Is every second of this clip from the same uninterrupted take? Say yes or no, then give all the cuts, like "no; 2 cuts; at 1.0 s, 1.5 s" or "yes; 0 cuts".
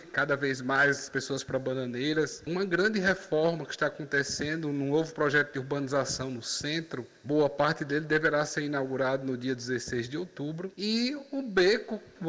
no; 2 cuts; at 1.1 s, 10.7 s